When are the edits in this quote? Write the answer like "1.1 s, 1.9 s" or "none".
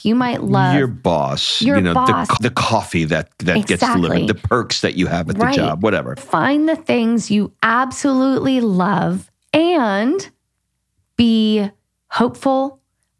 2.4 s, 6.2 s, 9.4 s